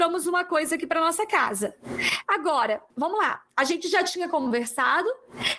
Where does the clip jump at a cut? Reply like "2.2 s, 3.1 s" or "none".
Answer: 2.9 s